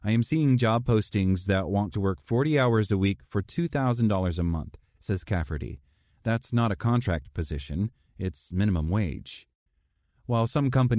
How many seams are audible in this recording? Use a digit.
1